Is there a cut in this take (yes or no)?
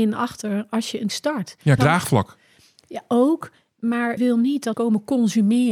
yes